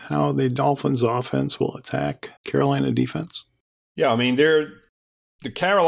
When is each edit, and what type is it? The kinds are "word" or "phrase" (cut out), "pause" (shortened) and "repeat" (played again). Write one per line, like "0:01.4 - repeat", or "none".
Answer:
0:02.4 - pause